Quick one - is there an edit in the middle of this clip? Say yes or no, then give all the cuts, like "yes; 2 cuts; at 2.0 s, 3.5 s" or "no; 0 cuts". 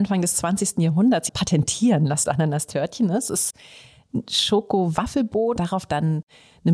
yes; 3 cuts; at 1.3 s, 2.3 s, 5.6 s